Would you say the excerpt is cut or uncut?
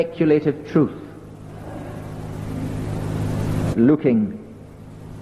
cut